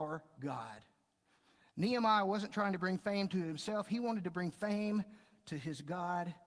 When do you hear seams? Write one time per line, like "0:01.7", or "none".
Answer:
none